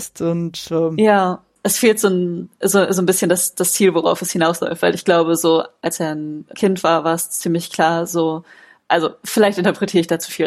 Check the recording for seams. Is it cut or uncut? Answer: uncut